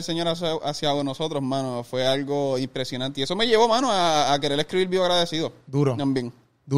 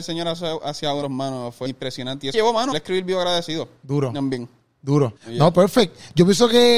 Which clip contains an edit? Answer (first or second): second